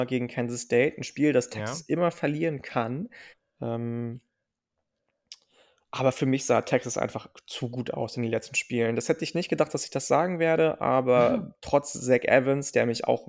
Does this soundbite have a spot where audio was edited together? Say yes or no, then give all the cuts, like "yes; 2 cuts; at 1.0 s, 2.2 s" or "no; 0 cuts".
yes; 1 cut; at 3.3 s